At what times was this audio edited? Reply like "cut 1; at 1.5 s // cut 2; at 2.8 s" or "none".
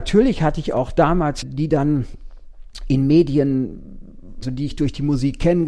cut 1; at 1.4 s // cut 2; at 4.4 s